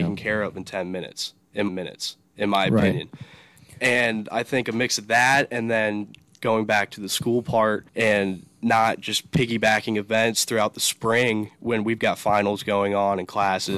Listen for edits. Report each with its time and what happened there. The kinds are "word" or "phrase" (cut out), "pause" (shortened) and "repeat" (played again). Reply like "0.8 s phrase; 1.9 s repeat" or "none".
1.7 s repeat; 7.9 s pause